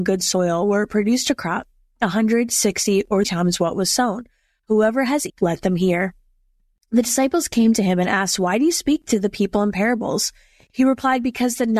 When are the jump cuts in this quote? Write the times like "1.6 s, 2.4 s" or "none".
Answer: 3.2 s, 5.3 s